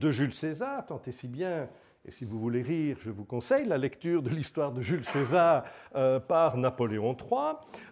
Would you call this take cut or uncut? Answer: uncut